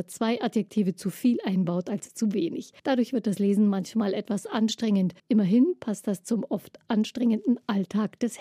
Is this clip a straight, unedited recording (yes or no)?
no